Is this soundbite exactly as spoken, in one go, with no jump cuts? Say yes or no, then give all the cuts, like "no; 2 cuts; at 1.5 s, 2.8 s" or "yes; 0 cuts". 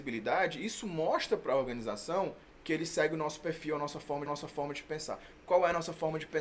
no; 2 cuts; at 2.5 s, 4.3 s